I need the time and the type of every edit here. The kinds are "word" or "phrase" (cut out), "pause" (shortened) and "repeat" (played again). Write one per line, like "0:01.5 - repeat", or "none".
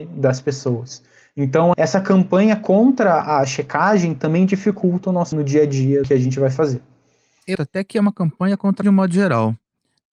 0:01.7 - word
0:05.3 - word
0:06.0 - word
0:07.5 - word
0:08.8 - word